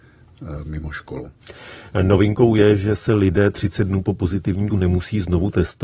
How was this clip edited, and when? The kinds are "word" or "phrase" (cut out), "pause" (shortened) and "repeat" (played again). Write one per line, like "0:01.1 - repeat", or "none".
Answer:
0:04.7 - word

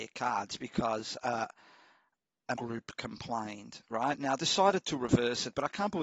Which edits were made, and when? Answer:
0:01.2 - word
0:02.6 - word
0:04.4 - word

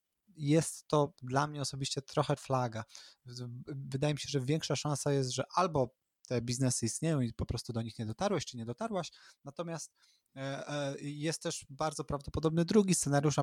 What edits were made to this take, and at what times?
0:02.4 - word

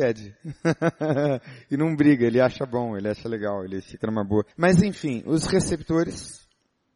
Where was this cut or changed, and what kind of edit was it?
0:04.5 - pause

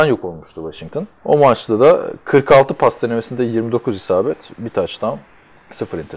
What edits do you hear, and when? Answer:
0:01.2 - pause

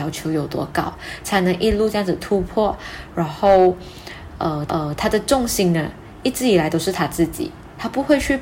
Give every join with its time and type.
0:04.7 - repeat

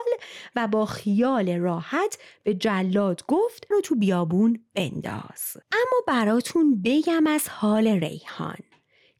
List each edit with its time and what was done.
0:03.7 - phrase
0:05.6 - pause

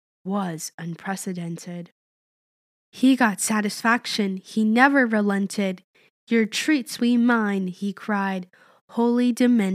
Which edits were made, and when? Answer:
0:07.0 - word

